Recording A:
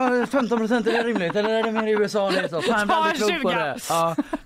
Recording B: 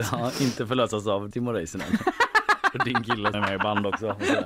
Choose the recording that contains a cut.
B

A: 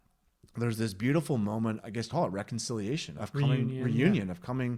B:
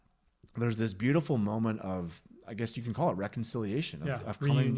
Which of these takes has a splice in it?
A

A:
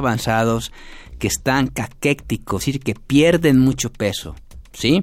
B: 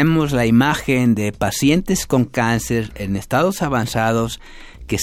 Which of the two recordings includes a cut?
A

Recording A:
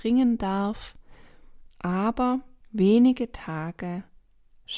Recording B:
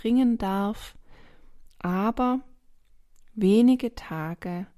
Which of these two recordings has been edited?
A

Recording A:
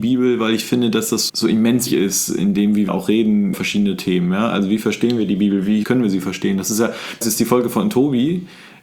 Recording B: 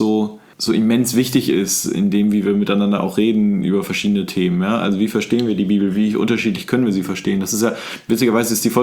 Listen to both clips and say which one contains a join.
A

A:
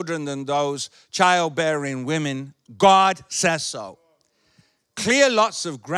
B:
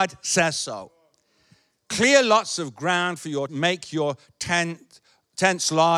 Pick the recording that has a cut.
B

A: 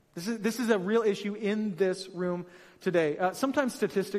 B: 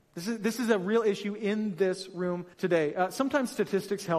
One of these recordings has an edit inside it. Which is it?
B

